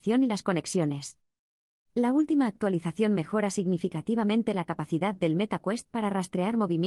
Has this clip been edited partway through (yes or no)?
no